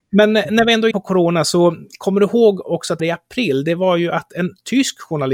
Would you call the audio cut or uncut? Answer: cut